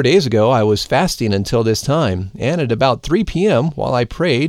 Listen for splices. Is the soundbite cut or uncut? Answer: uncut